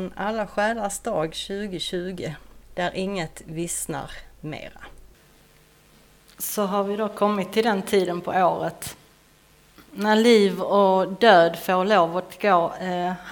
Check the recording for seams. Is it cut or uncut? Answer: cut